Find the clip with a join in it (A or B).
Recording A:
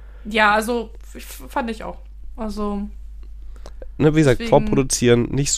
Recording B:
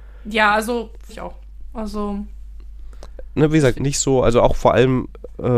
B